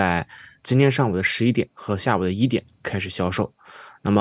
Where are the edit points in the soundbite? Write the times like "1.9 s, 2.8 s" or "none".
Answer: none